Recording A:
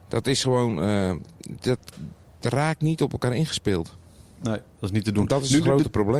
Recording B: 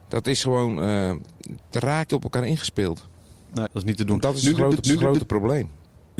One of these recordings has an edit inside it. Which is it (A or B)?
B